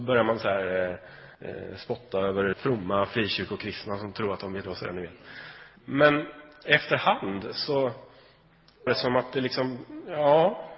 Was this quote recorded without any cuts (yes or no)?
no